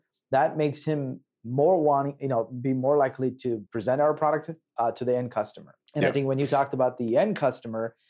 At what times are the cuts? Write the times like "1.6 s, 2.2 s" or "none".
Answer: 3.7 s, 5.8 s